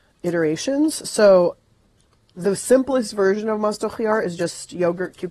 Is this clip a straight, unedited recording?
yes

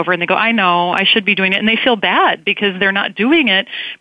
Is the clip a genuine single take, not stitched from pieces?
yes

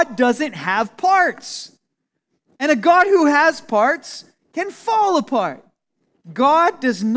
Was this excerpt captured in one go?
yes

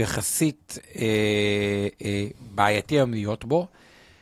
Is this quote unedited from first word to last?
yes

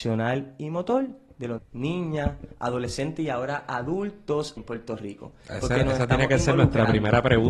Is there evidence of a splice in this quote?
yes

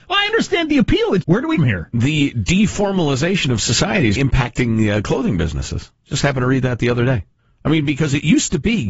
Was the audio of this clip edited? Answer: yes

